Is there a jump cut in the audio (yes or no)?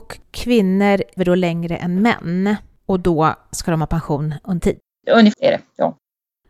yes